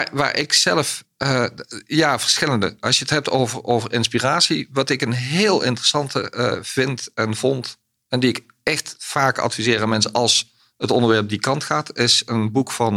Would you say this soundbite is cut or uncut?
uncut